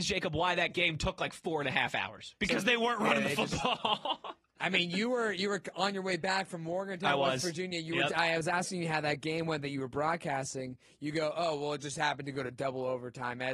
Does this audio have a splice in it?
no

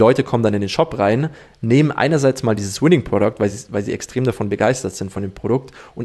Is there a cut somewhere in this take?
no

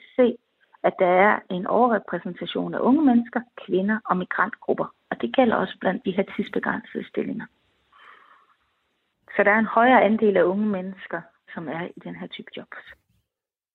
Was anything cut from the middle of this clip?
no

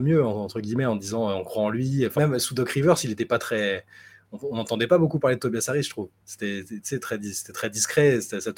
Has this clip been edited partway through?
yes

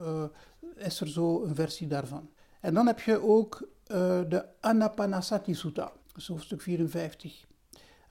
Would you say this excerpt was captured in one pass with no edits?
no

